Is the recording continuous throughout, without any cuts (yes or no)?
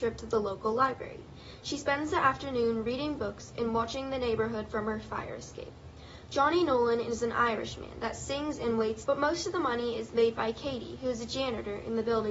no